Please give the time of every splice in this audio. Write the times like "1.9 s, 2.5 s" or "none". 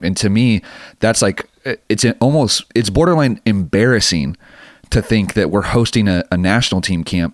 2.7 s

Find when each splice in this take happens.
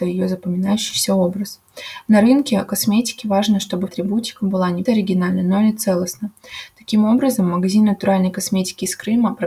3.9 s, 4.9 s

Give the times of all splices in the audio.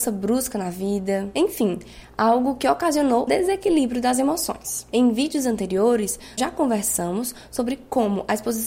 3.3 s, 6.4 s

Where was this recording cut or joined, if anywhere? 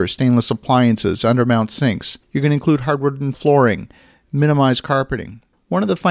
2.2 s, 3.3 s

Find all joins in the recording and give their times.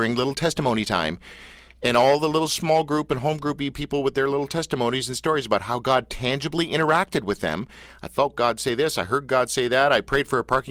none

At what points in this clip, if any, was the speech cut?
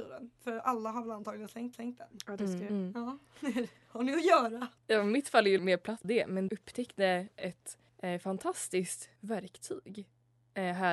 1.7 s, 2.7 s, 4.8 s, 5.6 s, 6.0 s, 6.5 s, 7.9 s, 9.2 s

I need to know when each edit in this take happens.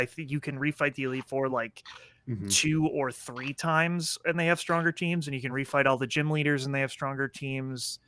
none

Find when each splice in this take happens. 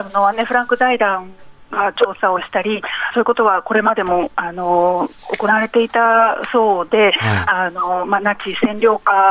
3.1 s, 5.2 s

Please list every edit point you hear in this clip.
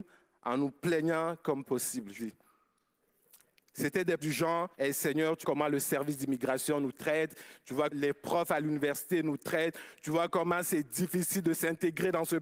1.6 s, 2.2 s, 4.2 s, 4.7 s, 5.4 s, 7.9 s

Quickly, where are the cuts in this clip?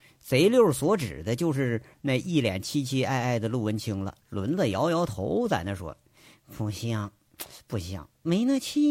4.2 s

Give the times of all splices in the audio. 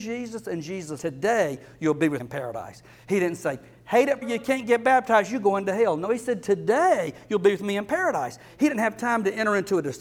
1.0 s, 2.2 s, 4.2 s

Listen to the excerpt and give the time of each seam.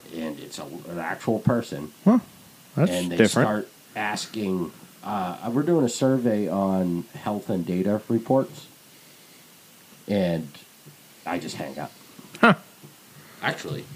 none

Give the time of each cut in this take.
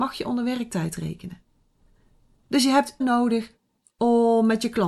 3.0 s

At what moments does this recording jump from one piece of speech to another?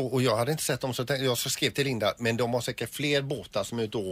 none

